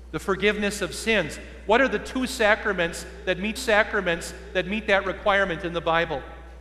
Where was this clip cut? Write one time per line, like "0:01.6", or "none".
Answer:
0:03.6